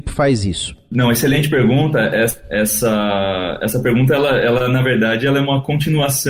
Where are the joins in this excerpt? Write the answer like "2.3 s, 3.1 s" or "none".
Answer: none